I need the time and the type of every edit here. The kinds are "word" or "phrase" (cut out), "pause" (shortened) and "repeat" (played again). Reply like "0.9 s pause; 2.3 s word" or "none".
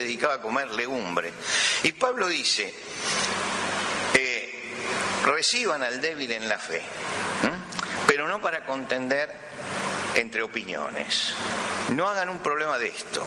none